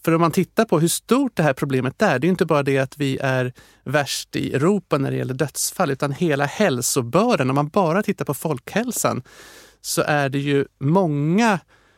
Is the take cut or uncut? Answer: uncut